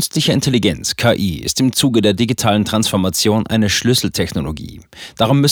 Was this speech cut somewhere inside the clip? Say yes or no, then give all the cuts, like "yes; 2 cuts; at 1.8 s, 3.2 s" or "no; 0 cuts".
no; 0 cuts